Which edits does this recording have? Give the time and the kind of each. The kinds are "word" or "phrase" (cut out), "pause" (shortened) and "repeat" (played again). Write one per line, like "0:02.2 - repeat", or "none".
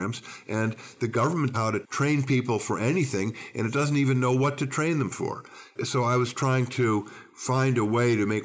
0:01.5 - phrase